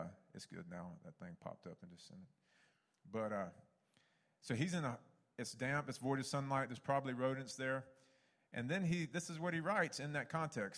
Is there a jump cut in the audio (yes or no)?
no